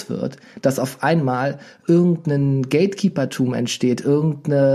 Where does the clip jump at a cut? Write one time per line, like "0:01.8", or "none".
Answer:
none